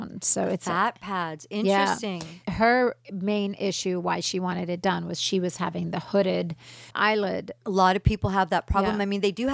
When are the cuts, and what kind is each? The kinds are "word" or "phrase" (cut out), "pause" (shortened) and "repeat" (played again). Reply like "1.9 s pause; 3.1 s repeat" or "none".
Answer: 6.9 s pause